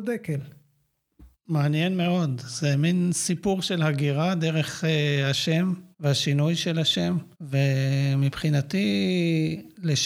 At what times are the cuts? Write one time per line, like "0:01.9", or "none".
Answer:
0:01.3
0:05.9
0:07.3

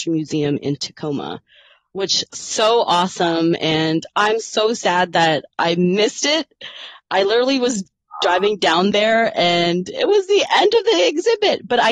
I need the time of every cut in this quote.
none

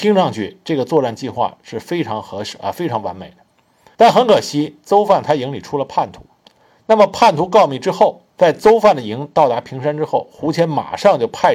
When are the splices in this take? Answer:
0:03.9
0:08.3

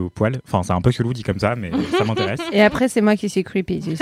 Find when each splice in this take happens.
none

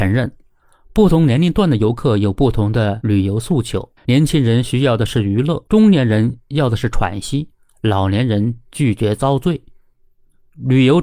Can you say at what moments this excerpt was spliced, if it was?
0:04.0
0:05.7

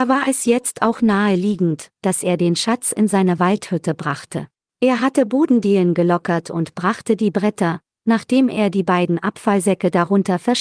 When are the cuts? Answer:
0:04.5

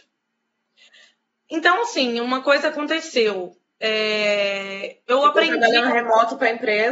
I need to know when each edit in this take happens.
none

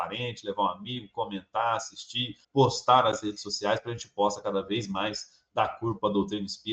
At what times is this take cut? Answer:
0:02.4

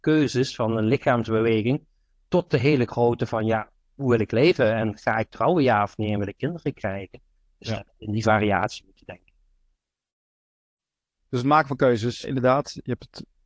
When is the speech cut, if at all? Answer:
0:12.2

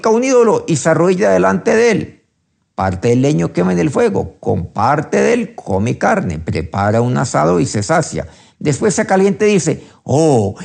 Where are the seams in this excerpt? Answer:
none

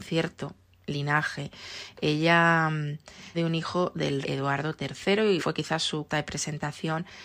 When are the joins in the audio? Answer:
0:03.3
0:04.2
0:05.4
0:06.1

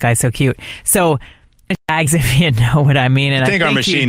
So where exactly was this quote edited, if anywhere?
0:02.1

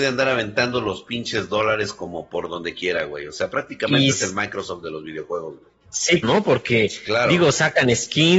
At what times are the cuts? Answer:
0:06.2

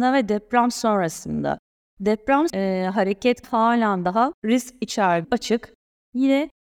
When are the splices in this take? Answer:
0:02.5
0:03.4
0:04.4
0:05.2

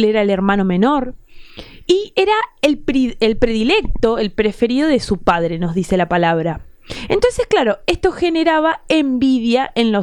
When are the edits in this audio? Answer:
none

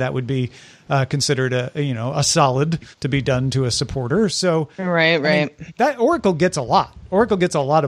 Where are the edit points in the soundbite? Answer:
0:02.9
0:05.7

